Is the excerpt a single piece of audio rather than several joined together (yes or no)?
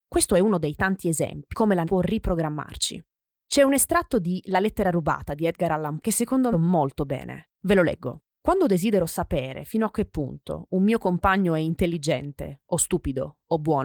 no